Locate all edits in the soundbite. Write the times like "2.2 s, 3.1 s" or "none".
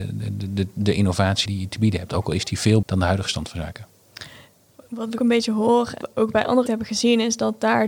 1.5 s, 2.8 s, 5.2 s, 6.0 s, 6.7 s